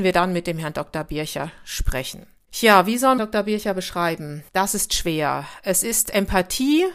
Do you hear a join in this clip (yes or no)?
yes